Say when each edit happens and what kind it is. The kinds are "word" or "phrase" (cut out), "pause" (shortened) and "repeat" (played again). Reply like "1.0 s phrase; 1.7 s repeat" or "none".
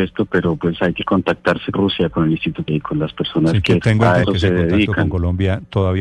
1.7 s word; 2.7 s word; 3.8 s word; 4.2 s word